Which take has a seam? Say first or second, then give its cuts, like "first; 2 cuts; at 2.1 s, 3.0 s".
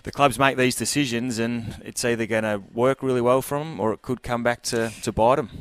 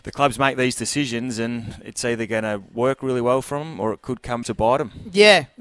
second; 1 cut; at 4.4 s